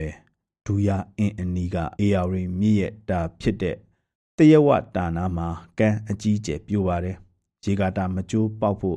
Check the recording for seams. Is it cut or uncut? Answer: cut